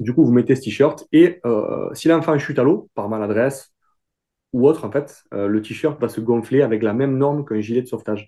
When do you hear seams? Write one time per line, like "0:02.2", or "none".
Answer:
none